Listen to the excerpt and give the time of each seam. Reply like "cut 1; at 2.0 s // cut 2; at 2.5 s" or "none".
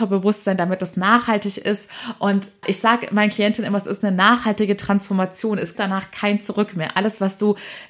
cut 1; at 2.6 s // cut 2; at 5.7 s